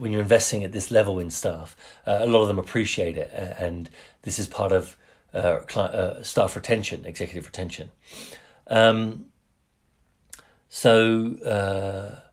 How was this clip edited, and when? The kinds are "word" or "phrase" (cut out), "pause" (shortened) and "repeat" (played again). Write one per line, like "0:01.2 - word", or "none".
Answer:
none